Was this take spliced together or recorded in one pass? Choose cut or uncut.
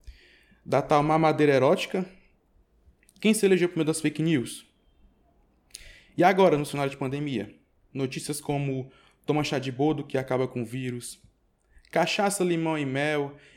uncut